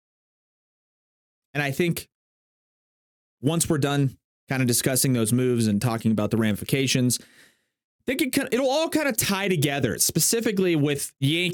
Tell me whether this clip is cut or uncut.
uncut